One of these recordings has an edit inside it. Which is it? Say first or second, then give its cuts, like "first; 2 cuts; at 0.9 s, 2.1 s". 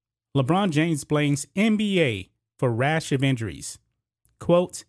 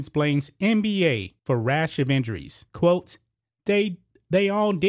second; 2 cuts; at 1.4 s, 2.7 s